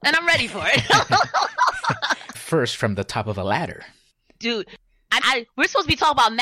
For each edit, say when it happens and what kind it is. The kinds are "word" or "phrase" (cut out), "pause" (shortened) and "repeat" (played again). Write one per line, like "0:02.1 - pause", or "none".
0:02.3 - word
0:05.2 - word